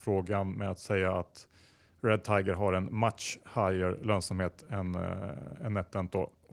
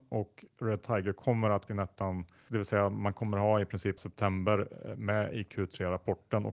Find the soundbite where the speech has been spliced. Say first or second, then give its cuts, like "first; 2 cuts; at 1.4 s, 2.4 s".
second; 3 cuts; at 1.7 s, 2.5 s, 4.0 s